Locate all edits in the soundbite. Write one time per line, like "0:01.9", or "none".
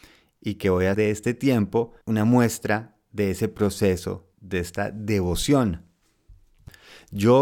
0:00.9
0:02.0
0:04.3